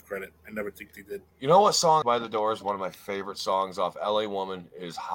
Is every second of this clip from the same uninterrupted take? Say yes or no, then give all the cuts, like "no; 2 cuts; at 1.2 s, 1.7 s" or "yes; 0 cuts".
no; 2 cuts; at 1.3 s, 2.0 s